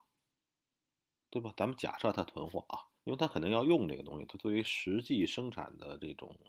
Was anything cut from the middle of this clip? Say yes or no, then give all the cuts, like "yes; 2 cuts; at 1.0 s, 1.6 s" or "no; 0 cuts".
yes; 1 cut; at 3.0 s